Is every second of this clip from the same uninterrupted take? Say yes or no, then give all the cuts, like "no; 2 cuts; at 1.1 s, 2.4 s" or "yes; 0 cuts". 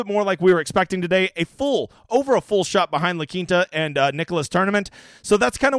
yes; 0 cuts